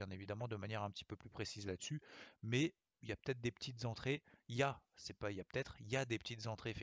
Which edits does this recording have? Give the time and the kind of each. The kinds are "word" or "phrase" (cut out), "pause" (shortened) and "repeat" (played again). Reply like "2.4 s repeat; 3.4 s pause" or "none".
none

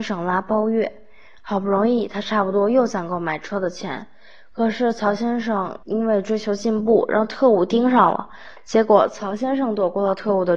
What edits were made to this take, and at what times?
5.8 s pause

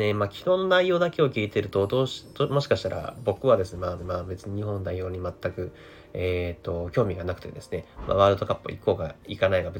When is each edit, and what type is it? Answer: 4.0 s repeat

